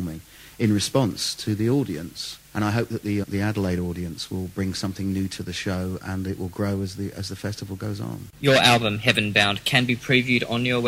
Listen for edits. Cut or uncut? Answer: cut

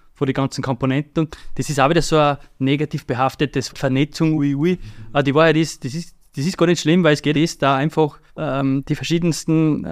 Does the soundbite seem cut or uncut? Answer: cut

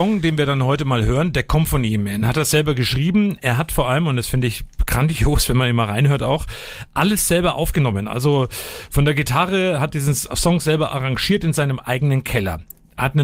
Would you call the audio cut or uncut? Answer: uncut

